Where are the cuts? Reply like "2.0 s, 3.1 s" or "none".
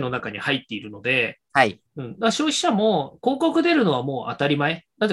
1.9 s